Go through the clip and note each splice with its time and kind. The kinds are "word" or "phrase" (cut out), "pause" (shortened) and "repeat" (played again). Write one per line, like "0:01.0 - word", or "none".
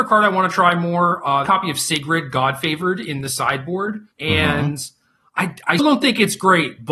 0:01.5 - phrase
0:04.1 - pause
0:05.8 - word